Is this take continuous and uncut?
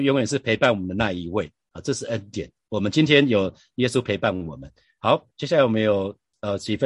no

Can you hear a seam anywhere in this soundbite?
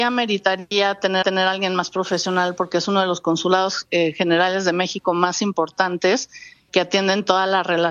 yes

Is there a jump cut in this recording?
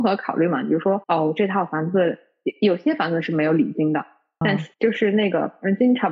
yes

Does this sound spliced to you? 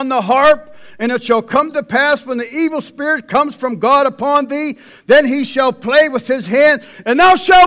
no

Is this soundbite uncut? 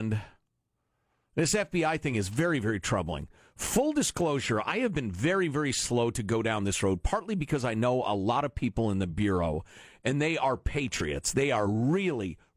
yes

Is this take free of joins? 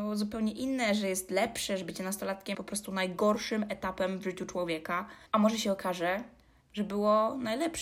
no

